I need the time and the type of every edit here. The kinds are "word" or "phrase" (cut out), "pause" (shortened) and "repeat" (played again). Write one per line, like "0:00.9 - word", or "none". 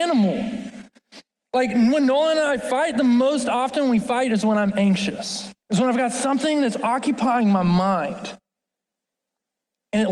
0:01.4 - pause
0:05.6 - pause